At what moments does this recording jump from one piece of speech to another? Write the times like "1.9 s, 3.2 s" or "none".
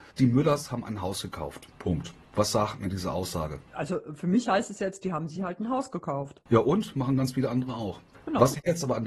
none